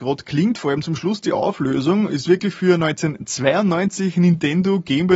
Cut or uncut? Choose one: uncut